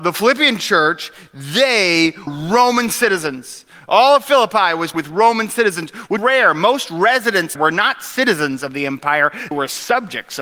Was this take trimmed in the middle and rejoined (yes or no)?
yes